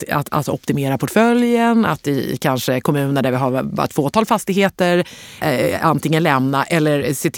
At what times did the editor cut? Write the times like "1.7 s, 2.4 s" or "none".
5.4 s